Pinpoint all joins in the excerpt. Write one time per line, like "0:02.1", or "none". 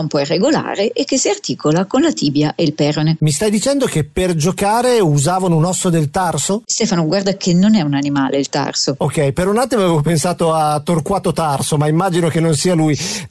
none